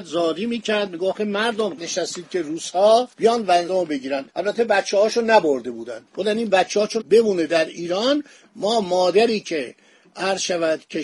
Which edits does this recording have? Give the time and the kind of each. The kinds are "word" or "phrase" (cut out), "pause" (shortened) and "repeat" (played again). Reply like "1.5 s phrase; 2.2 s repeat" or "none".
1.8 s phrase; 3.1 s pause; 3.7 s phrase; 4.3 s pause; 6.1 s pause; 7.0 s phrase